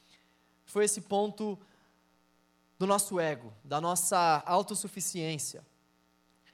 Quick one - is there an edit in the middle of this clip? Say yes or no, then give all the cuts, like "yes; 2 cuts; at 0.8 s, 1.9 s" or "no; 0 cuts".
no; 0 cuts